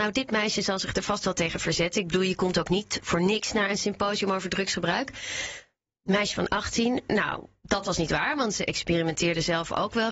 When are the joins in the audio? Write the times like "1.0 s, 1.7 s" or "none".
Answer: none